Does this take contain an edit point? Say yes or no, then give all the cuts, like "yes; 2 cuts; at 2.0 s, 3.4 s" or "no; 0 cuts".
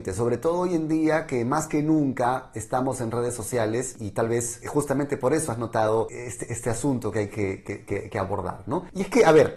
no; 0 cuts